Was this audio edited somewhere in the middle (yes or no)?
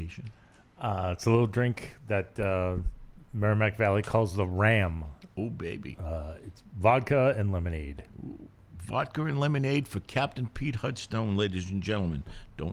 no